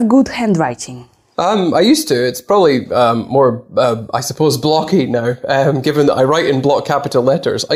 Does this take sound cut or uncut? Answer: uncut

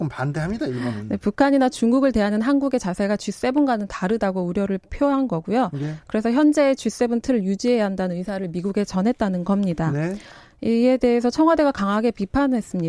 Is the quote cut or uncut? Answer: uncut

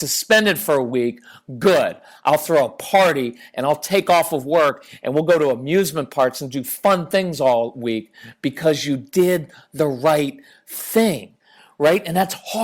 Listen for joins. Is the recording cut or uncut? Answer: uncut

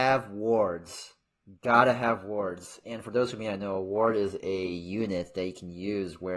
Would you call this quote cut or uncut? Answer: uncut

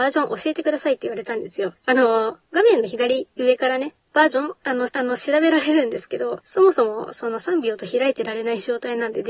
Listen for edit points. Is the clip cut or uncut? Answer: cut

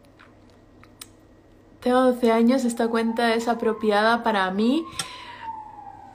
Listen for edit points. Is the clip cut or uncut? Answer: uncut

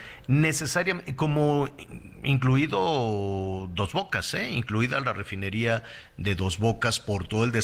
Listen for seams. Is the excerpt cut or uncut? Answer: uncut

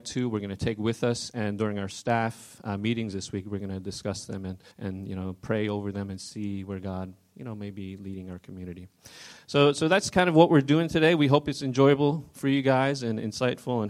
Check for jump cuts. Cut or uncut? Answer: cut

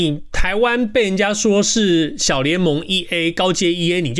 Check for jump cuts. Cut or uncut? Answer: uncut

